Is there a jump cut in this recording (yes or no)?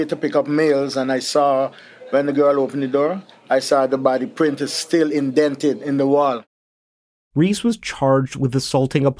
no